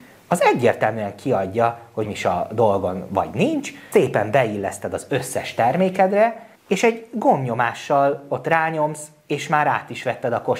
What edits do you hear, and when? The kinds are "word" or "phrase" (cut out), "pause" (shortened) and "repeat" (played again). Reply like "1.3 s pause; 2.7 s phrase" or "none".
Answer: 2.0 s phrase; 3.9 s word; 6.6 s pause